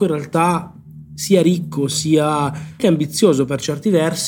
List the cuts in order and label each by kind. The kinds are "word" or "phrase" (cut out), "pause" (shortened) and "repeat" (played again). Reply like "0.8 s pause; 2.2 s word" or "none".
2.8 s word